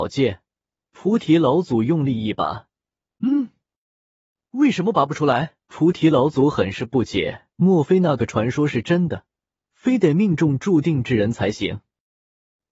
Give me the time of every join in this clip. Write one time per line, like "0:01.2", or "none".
0:03.1
0:05.6
0:07.5